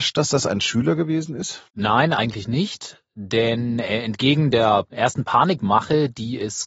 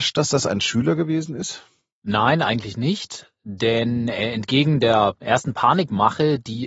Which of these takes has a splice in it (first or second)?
first